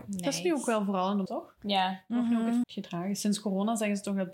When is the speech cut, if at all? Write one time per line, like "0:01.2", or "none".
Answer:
0:01.3
0:02.6